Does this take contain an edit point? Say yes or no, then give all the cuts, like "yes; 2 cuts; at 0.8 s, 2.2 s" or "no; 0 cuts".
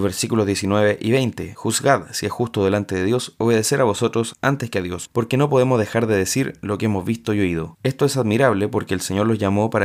no; 0 cuts